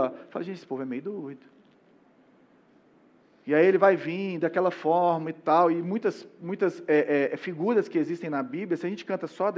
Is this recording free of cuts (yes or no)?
yes